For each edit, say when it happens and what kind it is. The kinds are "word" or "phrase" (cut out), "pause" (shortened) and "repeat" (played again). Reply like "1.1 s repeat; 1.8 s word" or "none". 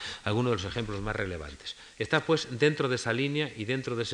none